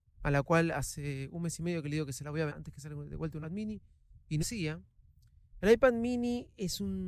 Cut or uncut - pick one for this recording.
cut